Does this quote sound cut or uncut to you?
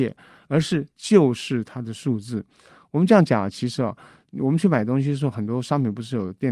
uncut